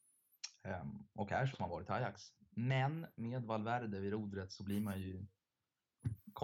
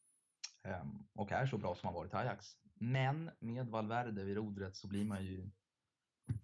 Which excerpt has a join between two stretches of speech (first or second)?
first